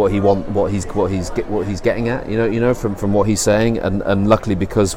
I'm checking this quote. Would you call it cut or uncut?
uncut